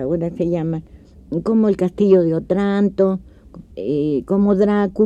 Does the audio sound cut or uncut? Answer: cut